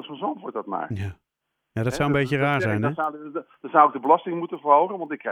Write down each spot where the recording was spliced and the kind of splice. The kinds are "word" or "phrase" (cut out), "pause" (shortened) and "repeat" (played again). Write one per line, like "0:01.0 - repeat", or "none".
none